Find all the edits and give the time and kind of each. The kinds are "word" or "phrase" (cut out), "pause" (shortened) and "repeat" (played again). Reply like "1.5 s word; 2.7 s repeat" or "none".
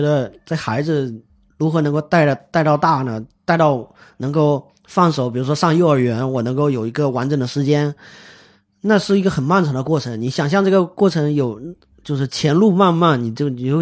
none